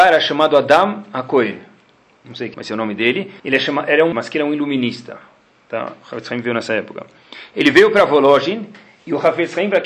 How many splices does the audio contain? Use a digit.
3